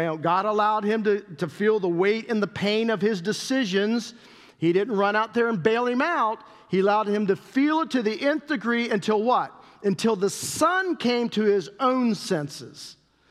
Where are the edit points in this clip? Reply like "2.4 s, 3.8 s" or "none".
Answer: none